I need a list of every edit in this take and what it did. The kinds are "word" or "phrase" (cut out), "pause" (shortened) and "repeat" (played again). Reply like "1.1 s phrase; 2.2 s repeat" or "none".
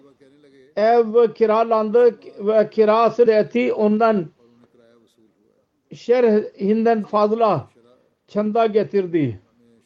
3.3 s word; 7.0 s word